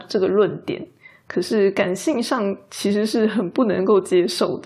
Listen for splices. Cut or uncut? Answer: uncut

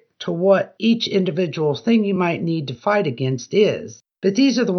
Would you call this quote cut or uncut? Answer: uncut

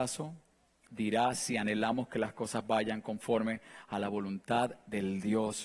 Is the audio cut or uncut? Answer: uncut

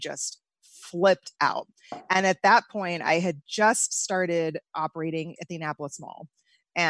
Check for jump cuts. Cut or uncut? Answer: cut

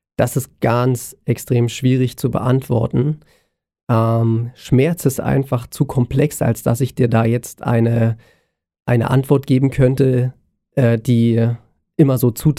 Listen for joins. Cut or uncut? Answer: uncut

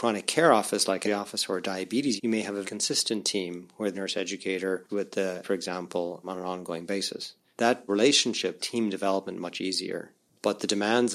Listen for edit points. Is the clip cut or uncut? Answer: cut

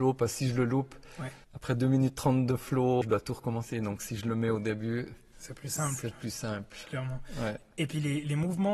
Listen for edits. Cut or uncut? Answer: cut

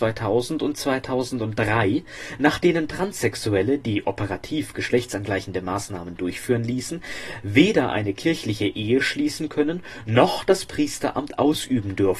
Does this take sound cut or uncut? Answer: uncut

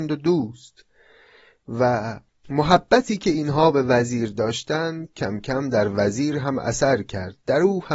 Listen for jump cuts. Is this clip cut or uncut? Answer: uncut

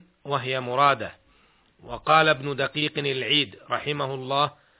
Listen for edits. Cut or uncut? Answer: uncut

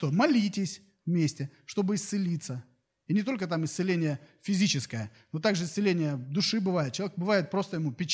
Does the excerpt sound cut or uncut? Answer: uncut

